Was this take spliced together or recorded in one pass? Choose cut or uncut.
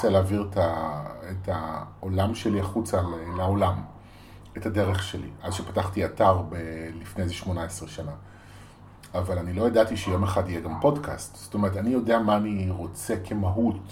uncut